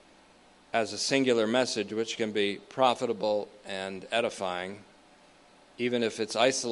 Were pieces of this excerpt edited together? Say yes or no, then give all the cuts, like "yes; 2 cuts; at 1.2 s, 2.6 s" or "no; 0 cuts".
no; 0 cuts